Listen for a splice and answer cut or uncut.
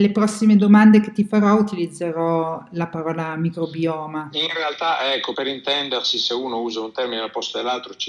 cut